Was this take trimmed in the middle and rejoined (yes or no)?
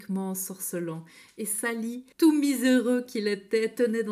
yes